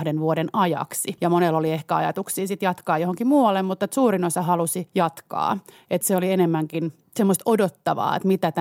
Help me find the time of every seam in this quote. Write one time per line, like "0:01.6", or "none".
0:06.0